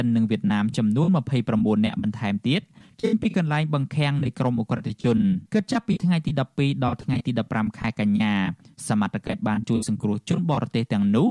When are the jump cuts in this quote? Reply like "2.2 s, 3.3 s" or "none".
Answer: 5.5 s